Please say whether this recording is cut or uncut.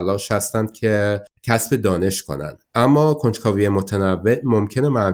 cut